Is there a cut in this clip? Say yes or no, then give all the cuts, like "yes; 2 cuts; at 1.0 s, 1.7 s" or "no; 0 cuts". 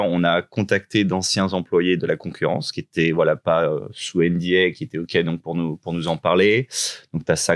yes; 1 cut; at 2.0 s